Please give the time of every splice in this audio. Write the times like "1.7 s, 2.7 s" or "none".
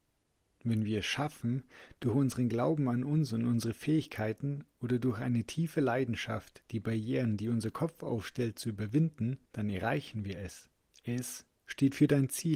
9.4 s, 10.9 s